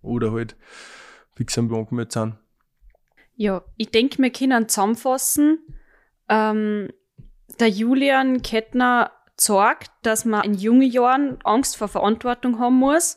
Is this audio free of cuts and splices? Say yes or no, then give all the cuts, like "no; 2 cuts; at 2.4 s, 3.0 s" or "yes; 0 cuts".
no; 3 cuts; at 1.7 s, 10.4 s, 11.5 s